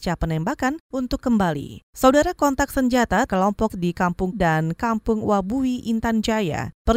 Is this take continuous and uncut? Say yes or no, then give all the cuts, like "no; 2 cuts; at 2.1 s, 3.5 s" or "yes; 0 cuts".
no; 3 cuts; at 3.3 s, 3.7 s, 4.3 s